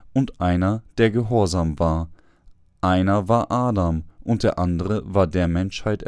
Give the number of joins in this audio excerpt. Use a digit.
0